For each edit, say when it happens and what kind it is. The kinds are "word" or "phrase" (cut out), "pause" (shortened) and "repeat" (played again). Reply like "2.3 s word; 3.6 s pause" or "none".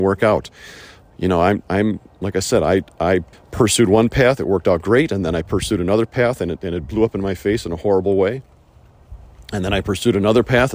3.3 s pause